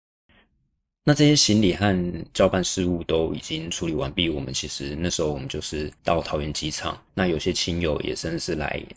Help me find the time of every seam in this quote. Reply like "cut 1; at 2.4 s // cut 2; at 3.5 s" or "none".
cut 1; at 6.0 s // cut 2; at 7.1 s